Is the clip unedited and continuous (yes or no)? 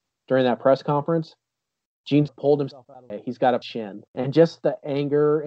no